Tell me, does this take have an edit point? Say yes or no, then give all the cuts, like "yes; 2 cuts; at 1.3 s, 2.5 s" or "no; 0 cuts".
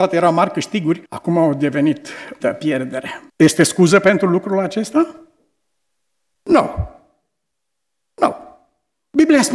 yes; 3 cuts; at 1.1 s, 2.4 s, 3.3 s